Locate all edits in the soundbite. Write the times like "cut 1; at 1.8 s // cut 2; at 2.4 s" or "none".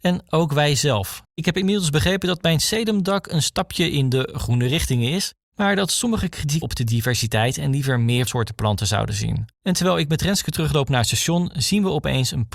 cut 1; at 1.2 s // cut 2; at 5.4 s // cut 3; at 6.6 s // cut 4; at 8.3 s // cut 5; at 9.5 s